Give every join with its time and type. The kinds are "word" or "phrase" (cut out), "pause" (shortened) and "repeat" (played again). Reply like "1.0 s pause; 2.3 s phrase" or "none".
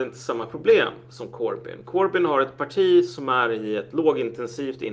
none